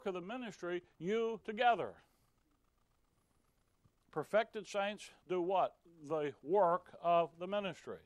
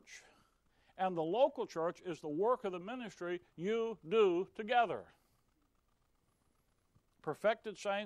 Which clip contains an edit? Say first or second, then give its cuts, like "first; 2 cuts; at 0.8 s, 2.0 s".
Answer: first; 1 cut; at 1.4 s